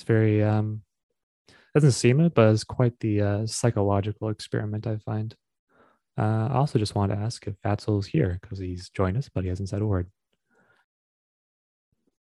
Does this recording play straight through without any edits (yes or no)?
yes